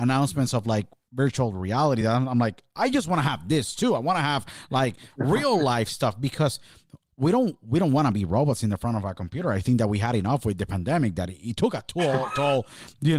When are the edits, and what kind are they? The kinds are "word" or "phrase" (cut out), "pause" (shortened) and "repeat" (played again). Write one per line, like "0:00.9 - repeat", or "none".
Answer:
none